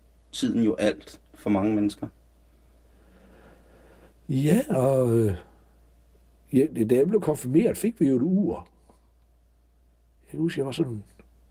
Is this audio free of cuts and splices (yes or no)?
yes